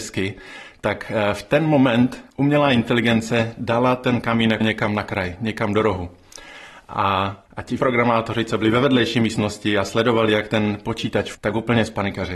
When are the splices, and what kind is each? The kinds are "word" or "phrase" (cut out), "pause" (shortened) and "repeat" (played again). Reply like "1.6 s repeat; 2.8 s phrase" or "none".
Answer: 2.3 s pause; 4.6 s word; 7.5 s pause; 7.8 s word; 11.3 s word